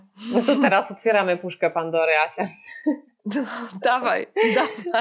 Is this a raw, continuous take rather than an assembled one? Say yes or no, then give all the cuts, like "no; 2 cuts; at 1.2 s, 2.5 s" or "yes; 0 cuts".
yes; 0 cuts